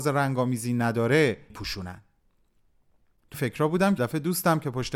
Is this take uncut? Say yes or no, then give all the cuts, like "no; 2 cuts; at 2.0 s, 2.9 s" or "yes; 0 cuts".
no; 3 cuts; at 1.5 s, 3.3 s, 4.0 s